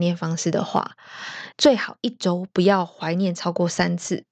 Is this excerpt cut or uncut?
cut